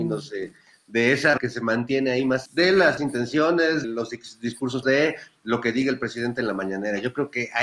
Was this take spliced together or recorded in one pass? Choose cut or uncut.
cut